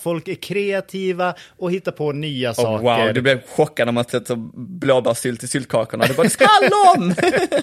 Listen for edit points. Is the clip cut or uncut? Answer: cut